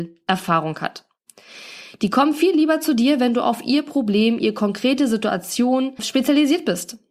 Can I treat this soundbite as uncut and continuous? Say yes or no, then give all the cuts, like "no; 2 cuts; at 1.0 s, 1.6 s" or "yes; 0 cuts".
yes; 0 cuts